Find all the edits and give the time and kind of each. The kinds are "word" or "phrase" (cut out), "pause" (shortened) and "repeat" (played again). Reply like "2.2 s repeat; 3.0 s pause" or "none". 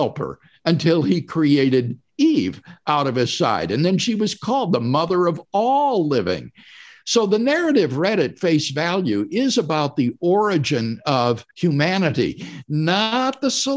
11.5 s pause